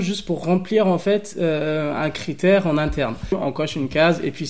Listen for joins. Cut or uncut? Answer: uncut